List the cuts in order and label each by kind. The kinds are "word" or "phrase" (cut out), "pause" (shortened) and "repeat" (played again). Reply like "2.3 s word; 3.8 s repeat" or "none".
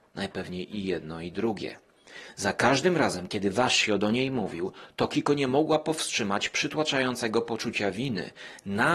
none